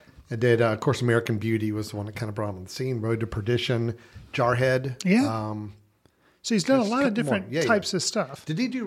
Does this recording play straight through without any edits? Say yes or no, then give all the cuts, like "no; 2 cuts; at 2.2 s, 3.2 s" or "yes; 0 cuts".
yes; 0 cuts